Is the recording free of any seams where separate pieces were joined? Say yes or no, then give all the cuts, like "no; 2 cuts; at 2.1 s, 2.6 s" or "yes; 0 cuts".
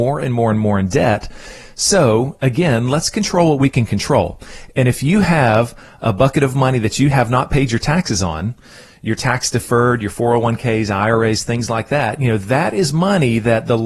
yes; 0 cuts